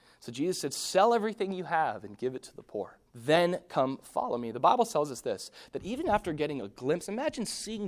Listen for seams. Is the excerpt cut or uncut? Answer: cut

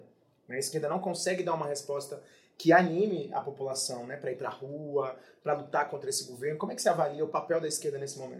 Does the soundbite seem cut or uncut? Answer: uncut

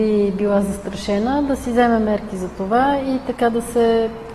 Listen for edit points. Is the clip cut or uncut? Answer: uncut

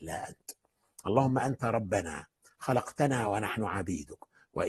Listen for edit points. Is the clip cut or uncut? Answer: uncut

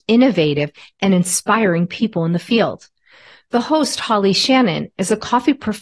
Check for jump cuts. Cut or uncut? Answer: uncut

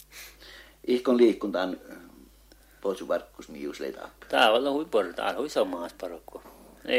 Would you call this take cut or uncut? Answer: uncut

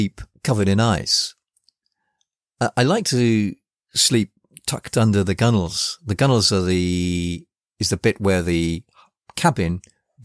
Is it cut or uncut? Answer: uncut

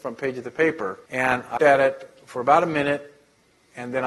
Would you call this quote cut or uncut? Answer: cut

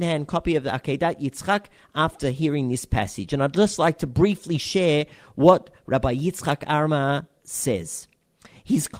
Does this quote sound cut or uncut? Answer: uncut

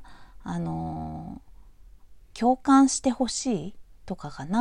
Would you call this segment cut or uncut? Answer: cut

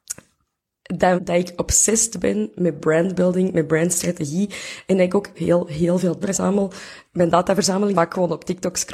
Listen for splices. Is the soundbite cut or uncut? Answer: cut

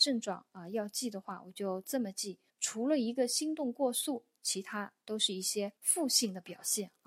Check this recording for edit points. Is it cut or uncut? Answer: cut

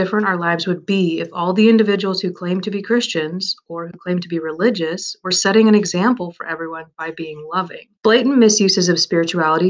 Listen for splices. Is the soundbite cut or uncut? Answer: cut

